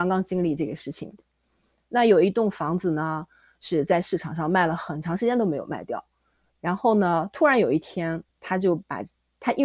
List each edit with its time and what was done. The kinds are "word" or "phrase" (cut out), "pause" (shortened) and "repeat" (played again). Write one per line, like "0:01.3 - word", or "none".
none